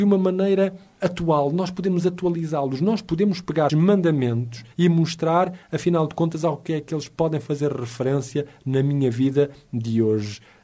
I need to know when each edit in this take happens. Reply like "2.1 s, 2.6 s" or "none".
3.7 s, 4.7 s, 5.6 s